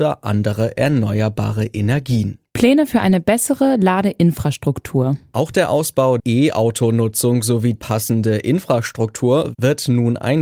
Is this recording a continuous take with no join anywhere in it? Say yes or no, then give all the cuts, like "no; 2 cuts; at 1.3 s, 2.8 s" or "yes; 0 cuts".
no; 2 cuts; at 6.2 s, 7.8 s